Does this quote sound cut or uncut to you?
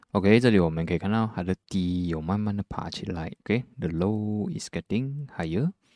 cut